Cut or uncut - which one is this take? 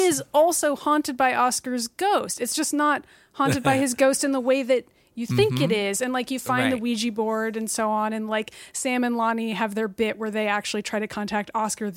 uncut